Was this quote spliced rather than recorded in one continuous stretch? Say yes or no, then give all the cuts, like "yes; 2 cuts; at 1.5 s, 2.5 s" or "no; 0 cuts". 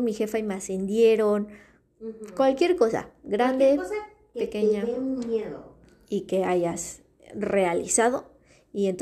no; 0 cuts